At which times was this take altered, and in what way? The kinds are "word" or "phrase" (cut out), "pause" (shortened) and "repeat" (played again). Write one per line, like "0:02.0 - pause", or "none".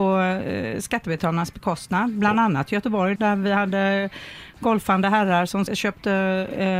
0:03.2 - word
0:05.7 - word